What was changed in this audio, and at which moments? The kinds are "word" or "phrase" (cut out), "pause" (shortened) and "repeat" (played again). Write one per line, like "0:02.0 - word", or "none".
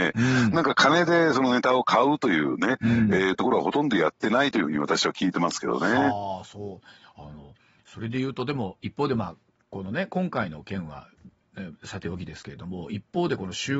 none